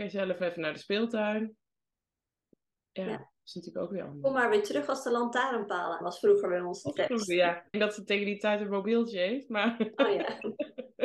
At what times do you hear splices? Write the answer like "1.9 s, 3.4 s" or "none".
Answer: 6.0 s, 7.7 s